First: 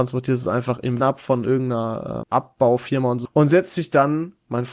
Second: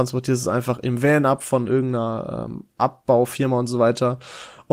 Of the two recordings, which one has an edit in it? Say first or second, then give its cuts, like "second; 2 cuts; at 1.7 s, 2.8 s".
first; 3 cuts; at 1.0 s, 2.2 s, 3.2 s